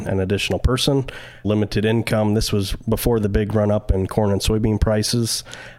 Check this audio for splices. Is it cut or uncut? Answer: cut